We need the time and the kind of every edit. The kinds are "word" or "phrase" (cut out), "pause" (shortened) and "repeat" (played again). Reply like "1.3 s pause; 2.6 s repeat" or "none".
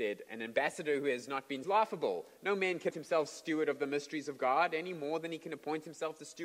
1.6 s phrase; 2.9 s word